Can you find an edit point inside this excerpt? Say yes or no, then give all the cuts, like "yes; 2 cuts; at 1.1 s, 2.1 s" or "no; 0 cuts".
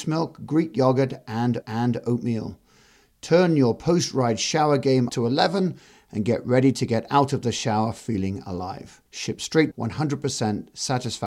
yes; 4 cuts; at 1.6 s, 5.1 s, 9.1 s, 9.7 s